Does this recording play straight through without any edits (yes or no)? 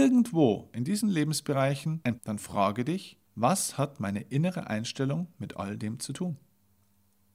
no